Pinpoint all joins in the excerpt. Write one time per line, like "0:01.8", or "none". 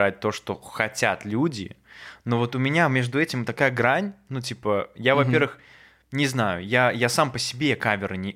none

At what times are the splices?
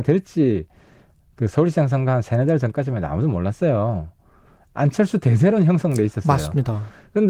none

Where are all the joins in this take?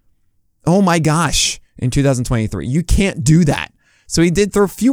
none

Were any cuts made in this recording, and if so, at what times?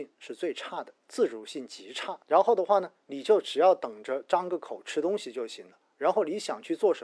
0:01.0
0:02.2

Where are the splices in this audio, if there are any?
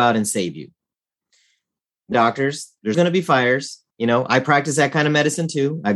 0:02.1
0:02.9
0:03.9

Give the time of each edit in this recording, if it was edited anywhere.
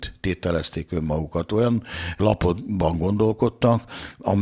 none

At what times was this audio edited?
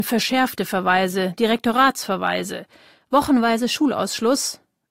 none

